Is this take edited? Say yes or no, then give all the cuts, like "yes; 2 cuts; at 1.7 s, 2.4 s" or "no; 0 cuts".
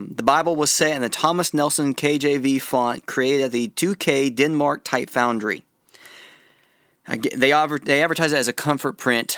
no; 0 cuts